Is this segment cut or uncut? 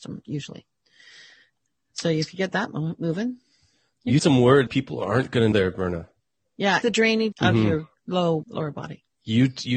cut